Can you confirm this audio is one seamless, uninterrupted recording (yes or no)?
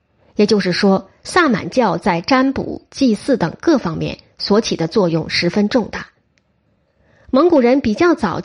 yes